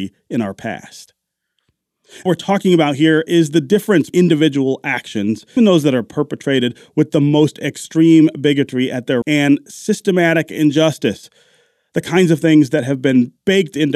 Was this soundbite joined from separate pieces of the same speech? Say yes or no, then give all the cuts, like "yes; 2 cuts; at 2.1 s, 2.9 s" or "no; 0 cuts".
yes; 4 cuts; at 2.3 s, 4.1 s, 5.6 s, 9.2 s